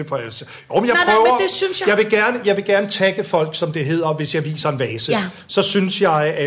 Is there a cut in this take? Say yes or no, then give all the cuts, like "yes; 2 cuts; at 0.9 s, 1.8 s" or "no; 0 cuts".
no; 0 cuts